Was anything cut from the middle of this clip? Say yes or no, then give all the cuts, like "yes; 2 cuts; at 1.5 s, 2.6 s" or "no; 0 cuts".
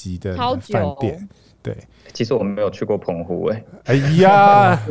no; 0 cuts